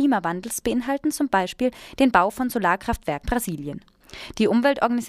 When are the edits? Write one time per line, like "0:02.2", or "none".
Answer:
0:03.2